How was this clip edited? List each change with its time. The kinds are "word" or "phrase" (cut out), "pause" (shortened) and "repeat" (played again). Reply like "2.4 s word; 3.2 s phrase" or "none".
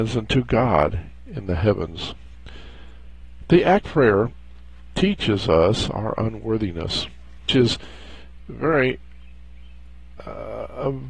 3.8 s word; 7.5 s word